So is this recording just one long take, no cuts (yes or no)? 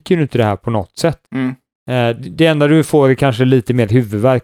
no